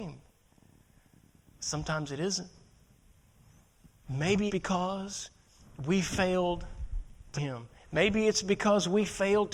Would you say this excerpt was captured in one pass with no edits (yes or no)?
no